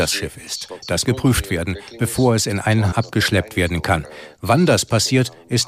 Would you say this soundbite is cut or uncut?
cut